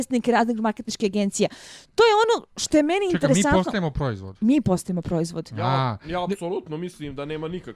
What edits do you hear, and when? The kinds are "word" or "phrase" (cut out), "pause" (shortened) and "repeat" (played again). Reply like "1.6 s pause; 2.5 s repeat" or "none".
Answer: none